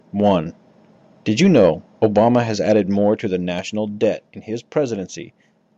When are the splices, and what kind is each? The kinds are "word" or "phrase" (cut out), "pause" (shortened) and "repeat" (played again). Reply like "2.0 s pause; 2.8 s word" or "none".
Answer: 4.3 s pause

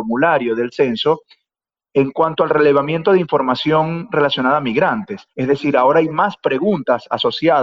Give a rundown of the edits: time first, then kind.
none

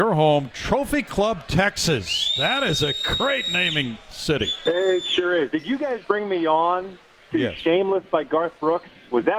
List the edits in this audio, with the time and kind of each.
6.0 s word

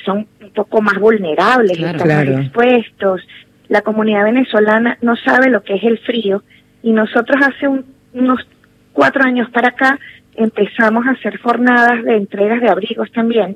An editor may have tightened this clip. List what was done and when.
none

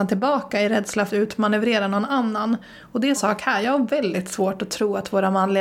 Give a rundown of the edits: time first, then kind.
1.1 s word; 3.2 s word

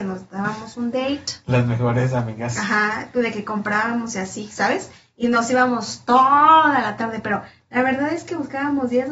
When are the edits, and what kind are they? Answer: none

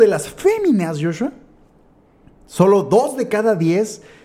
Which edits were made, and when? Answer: none

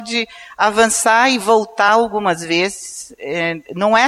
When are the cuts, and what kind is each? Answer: none

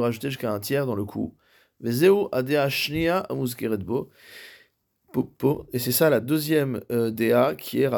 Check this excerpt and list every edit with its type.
none

